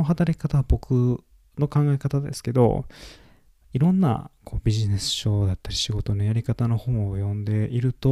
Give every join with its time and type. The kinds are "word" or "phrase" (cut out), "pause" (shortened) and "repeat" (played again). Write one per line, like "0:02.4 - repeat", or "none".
none